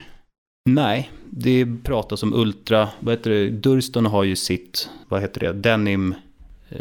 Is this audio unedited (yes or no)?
yes